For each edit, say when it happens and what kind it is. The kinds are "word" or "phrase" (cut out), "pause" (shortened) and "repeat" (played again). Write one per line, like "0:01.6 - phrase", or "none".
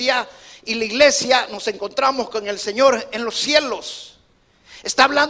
none